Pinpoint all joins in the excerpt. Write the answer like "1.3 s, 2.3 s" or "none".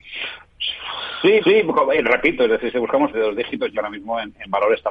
1.4 s, 3.1 s, 3.7 s